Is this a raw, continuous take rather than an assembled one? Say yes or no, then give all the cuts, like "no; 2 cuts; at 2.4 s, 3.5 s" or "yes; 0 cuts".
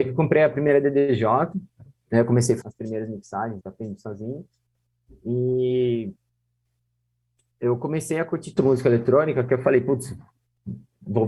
no; 3 cuts; at 2.6 s, 3.6 s, 8.6 s